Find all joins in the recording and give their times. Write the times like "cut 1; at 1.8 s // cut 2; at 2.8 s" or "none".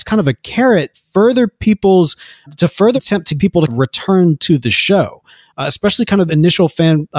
cut 1; at 0.9 s // cut 2; at 2.5 s // cut 3; at 3.0 s // cut 4; at 3.4 s // cut 5; at 3.7 s // cut 6; at 6.3 s